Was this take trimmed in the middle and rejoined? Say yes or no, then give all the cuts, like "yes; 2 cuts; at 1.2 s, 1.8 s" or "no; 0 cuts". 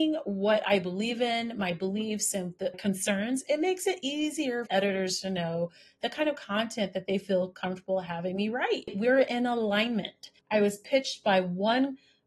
yes; 2 cuts; at 2.7 s, 4.7 s